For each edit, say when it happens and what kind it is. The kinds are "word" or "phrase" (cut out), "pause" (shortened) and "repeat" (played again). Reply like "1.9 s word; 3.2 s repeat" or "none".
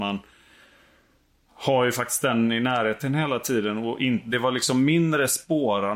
none